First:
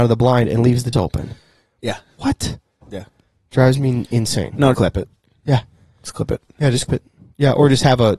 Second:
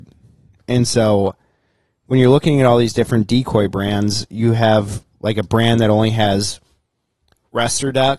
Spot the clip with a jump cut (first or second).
first